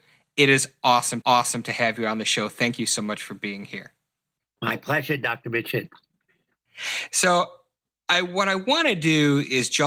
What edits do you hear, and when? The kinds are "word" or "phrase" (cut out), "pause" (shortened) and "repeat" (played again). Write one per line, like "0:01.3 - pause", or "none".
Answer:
0:01.2 - repeat